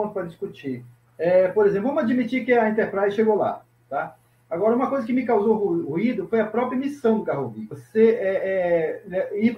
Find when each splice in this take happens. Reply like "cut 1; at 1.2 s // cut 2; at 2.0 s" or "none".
none